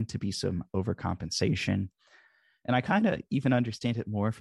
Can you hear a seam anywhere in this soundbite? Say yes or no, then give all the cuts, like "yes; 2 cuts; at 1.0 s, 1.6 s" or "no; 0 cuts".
no; 0 cuts